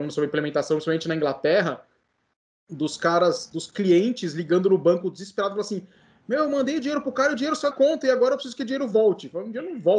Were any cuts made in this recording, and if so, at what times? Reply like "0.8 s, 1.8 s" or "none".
7.7 s